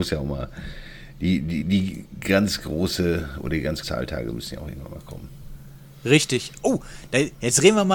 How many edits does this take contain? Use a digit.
2